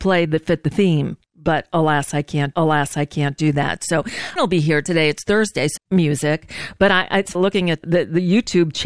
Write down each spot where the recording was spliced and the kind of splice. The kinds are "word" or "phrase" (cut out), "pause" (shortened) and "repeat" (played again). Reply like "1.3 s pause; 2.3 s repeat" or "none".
1.2 s pause; 2.5 s repeat; 4.4 s phrase; 5.8 s phrase; 7.3 s phrase; 7.8 s word